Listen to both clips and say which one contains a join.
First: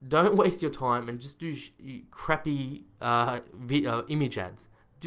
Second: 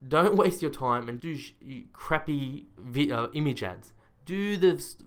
second; 2 cuts; at 1.2 s, 2.8 s

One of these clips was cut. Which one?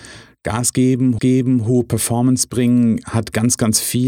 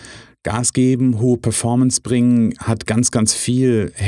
first; 1 cut; at 1.2 s

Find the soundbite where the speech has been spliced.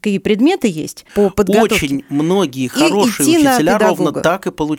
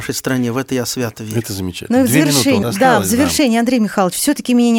second; 1 cut; at 2.6 s

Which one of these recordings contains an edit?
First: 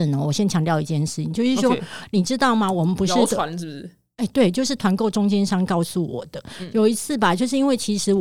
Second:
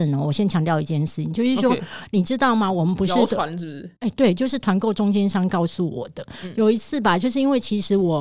second; 1 cut; at 4.0 s

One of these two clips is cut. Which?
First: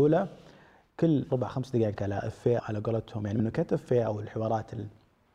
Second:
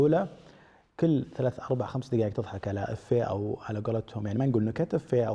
first; 4 cuts; at 1.3 s, 2.0 s, 2.6 s, 3.4 s

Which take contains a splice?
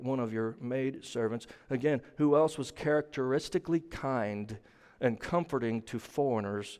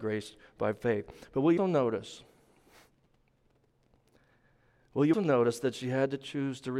second; 2 cuts; at 1.6 s, 5.1 s

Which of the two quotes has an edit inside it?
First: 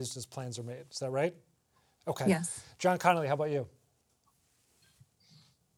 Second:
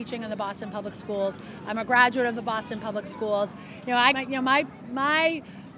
second; 1 cut; at 4.1 s

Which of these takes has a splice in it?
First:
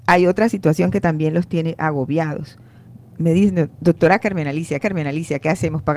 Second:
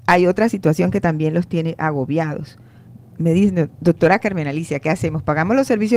first; 1 cut; at 4.8 s

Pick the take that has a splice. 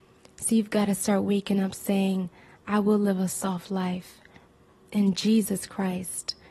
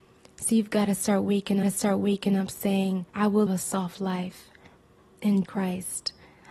second; 4 cuts; at 1.6 s, 3.1 s, 3.5 s, 5.5 s

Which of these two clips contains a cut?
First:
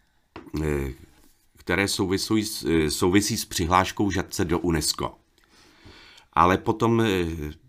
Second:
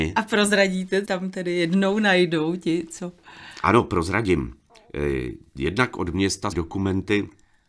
second; 2 cuts; at 1.0 s, 6.5 s

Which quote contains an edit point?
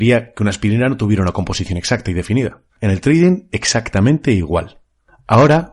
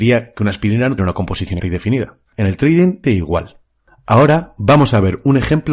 second; 3 cuts; at 1.0 s, 1.6 s, 3.0 s

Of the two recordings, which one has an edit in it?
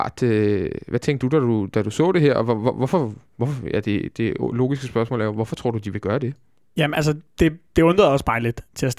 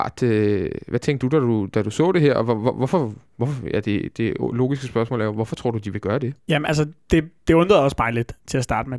second; 1 cut; at 6.4 s

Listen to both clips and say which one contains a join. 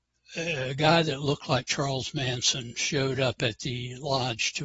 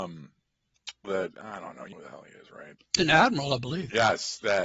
second; 3 cuts; at 1.0 s, 1.9 s, 3.0 s

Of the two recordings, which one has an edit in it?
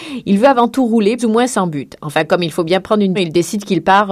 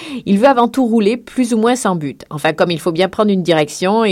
first; 2 cuts; at 1.2 s, 3.2 s

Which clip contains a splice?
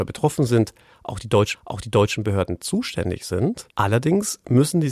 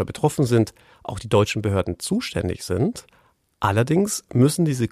first; 2 cuts; at 1.5 s, 3.7 s

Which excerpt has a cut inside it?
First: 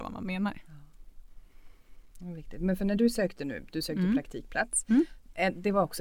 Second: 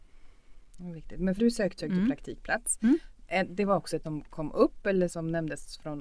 second; 4 cuts; at 1.4 s, 1.8 s, 4.0 s, 5.1 s

